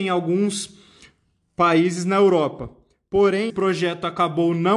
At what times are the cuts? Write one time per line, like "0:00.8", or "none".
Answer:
0:03.5